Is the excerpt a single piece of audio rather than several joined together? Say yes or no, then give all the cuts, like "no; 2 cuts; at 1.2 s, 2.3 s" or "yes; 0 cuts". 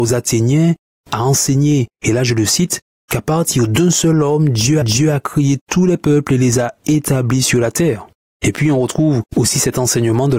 no; 2 cuts; at 4.8 s, 9.3 s